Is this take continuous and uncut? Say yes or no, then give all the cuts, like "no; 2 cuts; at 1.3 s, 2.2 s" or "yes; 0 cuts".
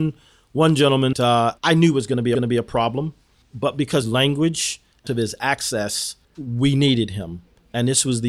no; 7 cuts; at 1.1 s, 1.6 s, 2.3 s, 3.4 s, 4.0 s, 5.1 s, 6.2 s